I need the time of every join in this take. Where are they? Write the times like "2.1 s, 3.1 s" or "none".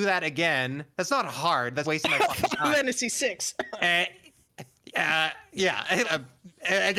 1.8 s, 6.0 s